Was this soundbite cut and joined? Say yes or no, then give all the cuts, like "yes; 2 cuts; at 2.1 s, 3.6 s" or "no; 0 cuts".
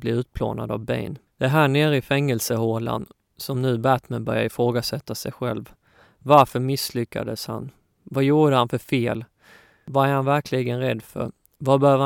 no; 0 cuts